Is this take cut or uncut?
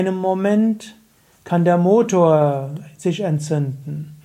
uncut